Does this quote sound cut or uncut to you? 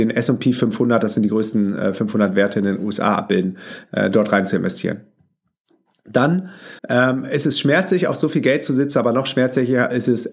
cut